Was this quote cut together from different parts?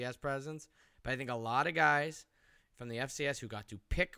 no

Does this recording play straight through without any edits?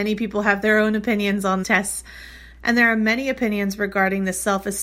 no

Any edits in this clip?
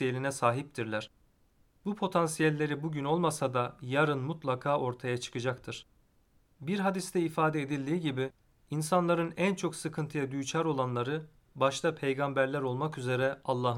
no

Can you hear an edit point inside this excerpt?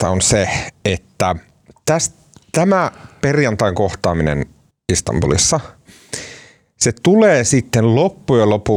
yes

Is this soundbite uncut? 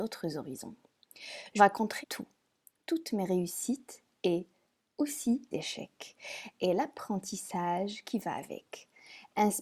no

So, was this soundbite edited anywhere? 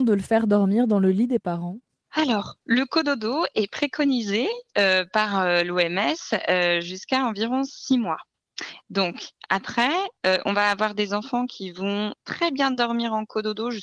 no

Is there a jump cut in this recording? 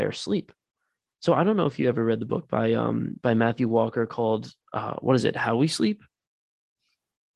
no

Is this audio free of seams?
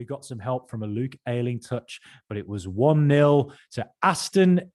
yes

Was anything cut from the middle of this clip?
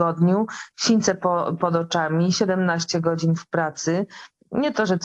no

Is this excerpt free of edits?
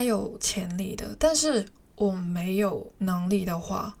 yes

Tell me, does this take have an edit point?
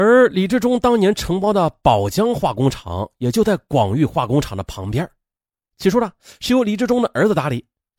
no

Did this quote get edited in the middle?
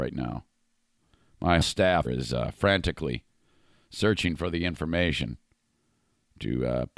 yes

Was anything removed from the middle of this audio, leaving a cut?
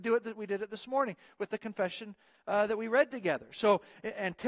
no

